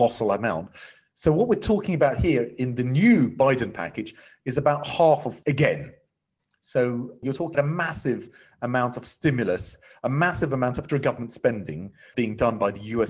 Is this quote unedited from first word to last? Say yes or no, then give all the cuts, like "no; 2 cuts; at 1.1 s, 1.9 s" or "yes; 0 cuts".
no; 5 cuts; at 5.4 s, 7.2 s, 7.5 s, 10.9 s, 12.1 s